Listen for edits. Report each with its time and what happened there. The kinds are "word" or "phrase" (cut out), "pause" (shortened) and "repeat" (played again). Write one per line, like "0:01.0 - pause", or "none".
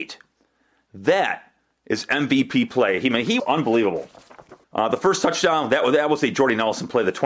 0:01.7 - pause
0:03.4 - word
0:04.6 - pause